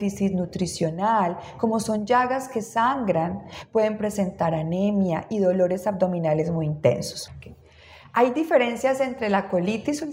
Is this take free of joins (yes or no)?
yes